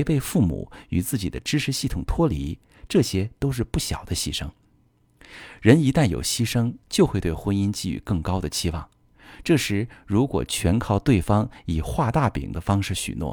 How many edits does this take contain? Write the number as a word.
one